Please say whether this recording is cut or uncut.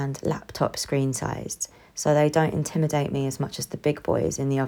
uncut